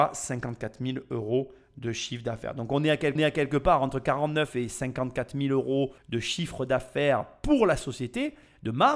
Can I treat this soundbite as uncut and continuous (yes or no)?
no